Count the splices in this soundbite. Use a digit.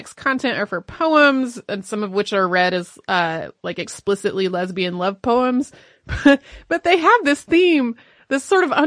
0